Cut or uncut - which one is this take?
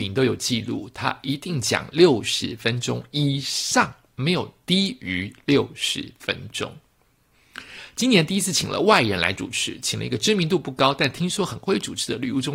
uncut